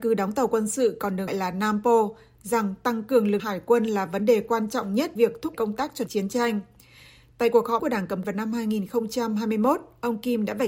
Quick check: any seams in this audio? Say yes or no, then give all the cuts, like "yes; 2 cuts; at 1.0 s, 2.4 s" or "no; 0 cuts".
yes; 7 cuts; at 1.3 s, 3.4 s, 5.2 s, 5.5 s, 6.1 s, 7.8 s, 8.2 s